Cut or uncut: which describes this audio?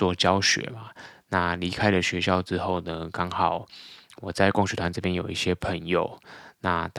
uncut